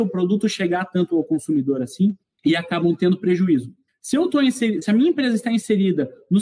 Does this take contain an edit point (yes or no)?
yes